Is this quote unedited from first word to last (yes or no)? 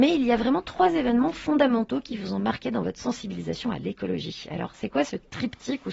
yes